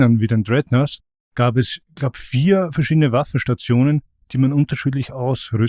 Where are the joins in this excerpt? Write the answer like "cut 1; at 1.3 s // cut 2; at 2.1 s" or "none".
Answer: none

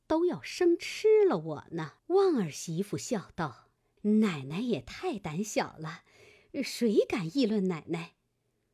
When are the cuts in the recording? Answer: cut 1; at 2.0 s // cut 2; at 3.8 s

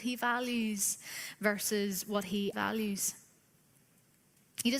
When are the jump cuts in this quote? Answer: cut 1; at 2.5 s

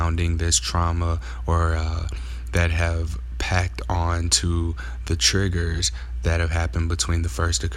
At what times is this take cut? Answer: none

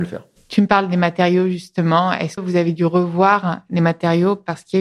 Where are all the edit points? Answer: cut 1; at 2.4 s

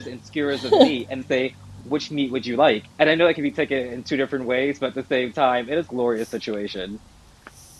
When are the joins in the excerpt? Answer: cut 1; at 1.2 s // cut 2; at 1.8 s // cut 3; at 2.9 s // cut 4; at 5.9 s

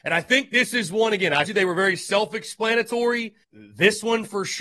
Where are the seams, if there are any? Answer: cut 1; at 1.4 s // cut 2; at 3.4 s

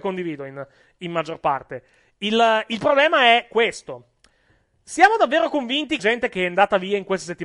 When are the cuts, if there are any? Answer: cut 1; at 6.0 s

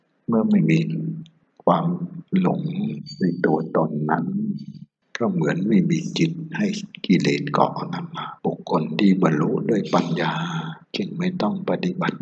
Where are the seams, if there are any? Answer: cut 1; at 2.3 s // cut 2; at 8.4 s // cut 3; at 10.8 s

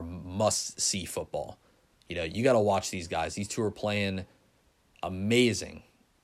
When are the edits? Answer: none

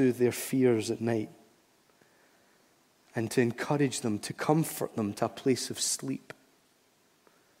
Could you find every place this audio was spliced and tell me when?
none

